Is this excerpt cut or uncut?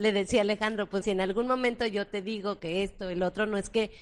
cut